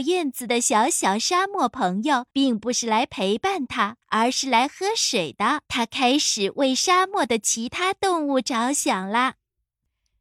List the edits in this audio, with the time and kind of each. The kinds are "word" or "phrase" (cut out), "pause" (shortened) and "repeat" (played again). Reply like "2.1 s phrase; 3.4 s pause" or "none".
2.3 s pause; 4.0 s pause; 5.7 s pause